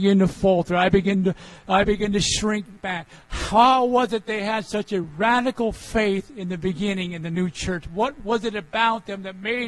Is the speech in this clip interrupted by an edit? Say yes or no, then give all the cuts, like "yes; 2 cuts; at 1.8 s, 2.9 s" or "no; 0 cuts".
no; 0 cuts